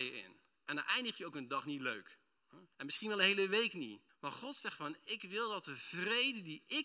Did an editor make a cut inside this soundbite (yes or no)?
yes